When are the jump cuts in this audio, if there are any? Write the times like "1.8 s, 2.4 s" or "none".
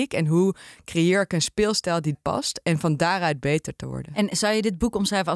2.1 s